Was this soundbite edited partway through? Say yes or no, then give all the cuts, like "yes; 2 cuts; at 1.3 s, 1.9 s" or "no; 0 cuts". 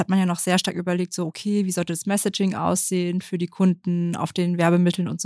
no; 0 cuts